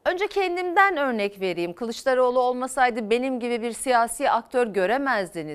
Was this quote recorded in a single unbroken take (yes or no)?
yes